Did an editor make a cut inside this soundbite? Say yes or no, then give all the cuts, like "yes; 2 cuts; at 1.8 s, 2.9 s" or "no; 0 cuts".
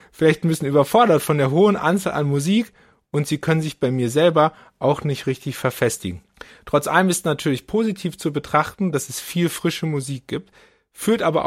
no; 0 cuts